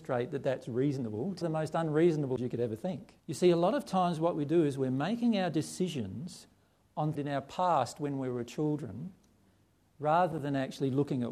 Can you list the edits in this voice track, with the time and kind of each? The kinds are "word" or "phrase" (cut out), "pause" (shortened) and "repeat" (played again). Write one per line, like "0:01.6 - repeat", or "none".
0:01.4 - phrase
0:02.4 - word
0:03.2 - pause
0:07.1 - phrase